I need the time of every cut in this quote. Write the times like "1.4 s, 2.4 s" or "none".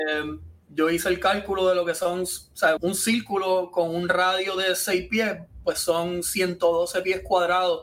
2.8 s